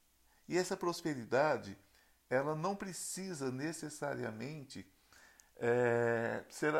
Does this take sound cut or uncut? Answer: uncut